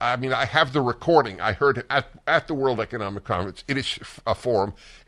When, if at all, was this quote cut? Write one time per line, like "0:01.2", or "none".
none